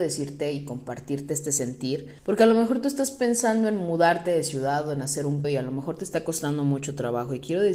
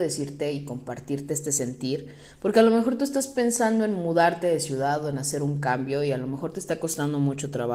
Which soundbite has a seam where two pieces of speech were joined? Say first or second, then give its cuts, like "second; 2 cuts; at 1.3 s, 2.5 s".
first; 2 cuts; at 2.2 s, 5.4 s